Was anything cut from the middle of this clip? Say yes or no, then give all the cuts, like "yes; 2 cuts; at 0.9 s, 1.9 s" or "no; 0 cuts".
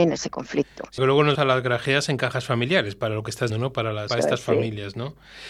yes; 4 cuts; at 1.0 s, 1.3 s, 3.5 s, 4.1 s